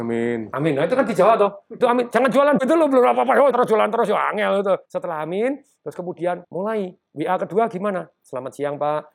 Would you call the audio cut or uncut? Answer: cut